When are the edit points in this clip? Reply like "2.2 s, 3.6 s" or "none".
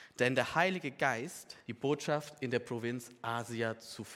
1.7 s